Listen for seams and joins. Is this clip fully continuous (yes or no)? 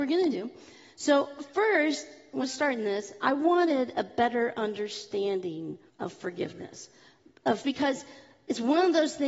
no